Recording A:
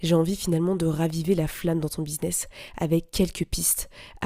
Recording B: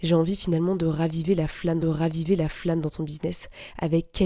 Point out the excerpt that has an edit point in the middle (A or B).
B